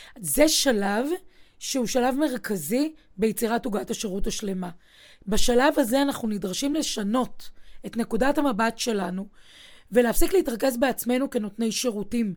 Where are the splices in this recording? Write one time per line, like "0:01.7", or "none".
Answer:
none